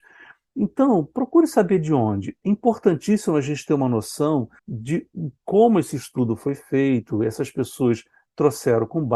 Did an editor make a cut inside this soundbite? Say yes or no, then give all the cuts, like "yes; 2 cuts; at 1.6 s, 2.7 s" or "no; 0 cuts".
yes; 1 cut; at 4.6 s